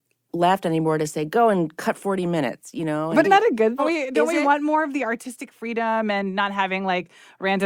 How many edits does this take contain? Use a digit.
2